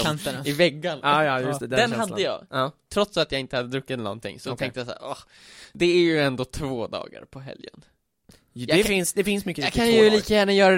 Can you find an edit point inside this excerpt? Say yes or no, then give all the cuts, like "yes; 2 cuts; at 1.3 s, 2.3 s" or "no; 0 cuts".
no; 0 cuts